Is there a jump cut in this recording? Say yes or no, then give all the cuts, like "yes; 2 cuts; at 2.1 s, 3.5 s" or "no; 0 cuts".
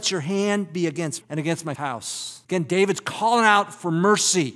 yes; 3 cuts; at 1.2 s, 1.8 s, 2.4 s